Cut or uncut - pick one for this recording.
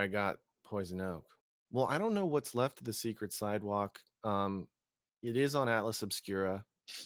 uncut